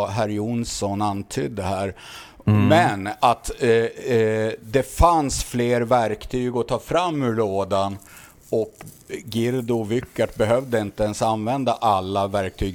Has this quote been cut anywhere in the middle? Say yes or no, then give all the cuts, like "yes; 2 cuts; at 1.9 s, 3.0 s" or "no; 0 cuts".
no; 0 cuts